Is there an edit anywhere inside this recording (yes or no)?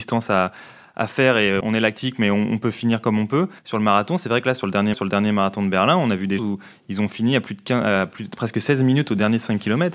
yes